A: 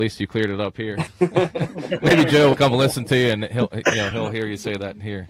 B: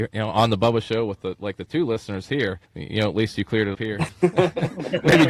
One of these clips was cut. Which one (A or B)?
B